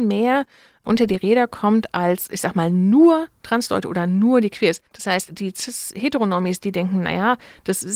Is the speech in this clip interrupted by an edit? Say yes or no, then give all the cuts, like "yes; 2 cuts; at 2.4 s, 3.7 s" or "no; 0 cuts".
yes; 1 cut; at 4.9 s